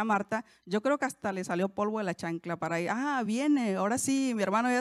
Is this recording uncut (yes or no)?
yes